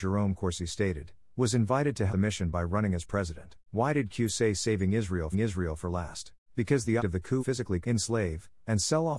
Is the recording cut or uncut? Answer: cut